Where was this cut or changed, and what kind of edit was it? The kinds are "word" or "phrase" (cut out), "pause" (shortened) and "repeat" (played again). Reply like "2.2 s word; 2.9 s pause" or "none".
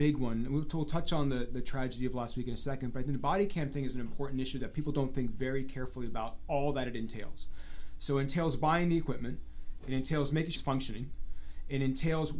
10.6 s phrase